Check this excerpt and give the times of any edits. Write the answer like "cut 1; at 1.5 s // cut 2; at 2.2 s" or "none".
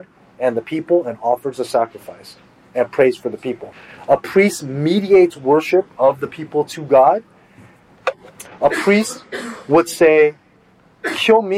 none